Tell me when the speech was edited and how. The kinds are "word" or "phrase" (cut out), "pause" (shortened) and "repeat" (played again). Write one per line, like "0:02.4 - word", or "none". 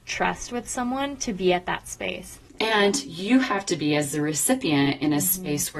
0:02.5 - pause